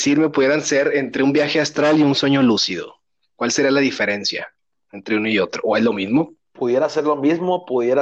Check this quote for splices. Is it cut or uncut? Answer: uncut